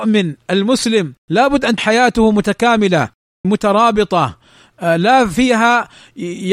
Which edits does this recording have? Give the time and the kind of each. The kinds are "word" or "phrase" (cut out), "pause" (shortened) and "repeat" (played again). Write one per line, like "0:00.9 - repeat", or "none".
0:01.2 - pause
0:01.8 - word
0:03.4 - word